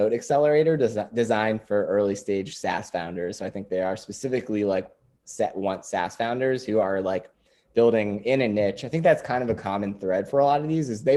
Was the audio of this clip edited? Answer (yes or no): no